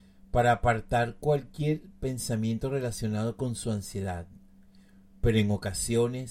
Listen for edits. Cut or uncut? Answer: uncut